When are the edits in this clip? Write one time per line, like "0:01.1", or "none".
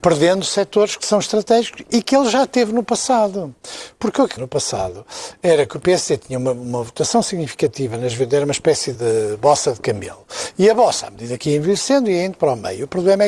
0:04.4
0:08.9